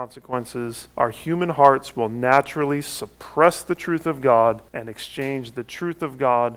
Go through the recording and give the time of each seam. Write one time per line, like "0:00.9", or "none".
0:00.9
0:04.7